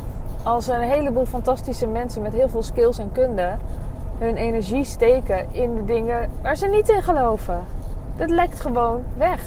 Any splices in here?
no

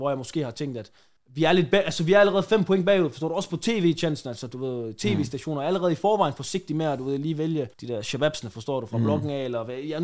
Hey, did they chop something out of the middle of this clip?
yes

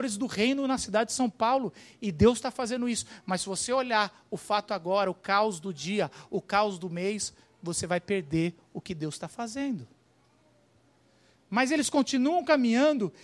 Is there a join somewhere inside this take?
no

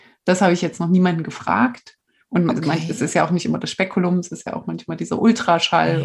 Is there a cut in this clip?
no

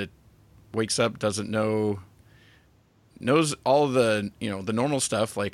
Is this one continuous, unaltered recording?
yes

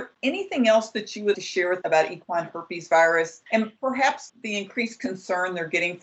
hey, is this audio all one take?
no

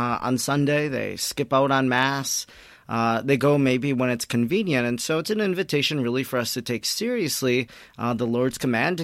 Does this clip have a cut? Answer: no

